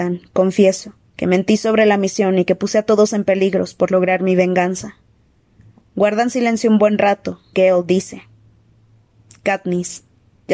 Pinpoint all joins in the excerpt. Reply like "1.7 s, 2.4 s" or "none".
1.0 s, 7.5 s